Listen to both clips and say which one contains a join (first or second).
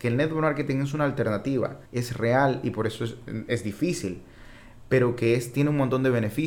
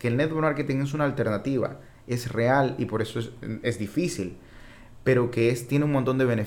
first